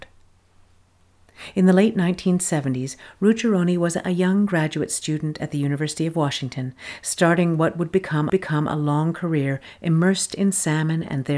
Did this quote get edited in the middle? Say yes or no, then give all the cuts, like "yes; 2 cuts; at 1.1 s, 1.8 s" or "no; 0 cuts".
yes; 1 cut; at 8.3 s